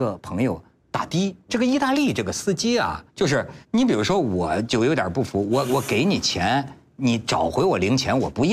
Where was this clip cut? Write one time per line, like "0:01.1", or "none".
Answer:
0:01.5
0:03.1
0:03.6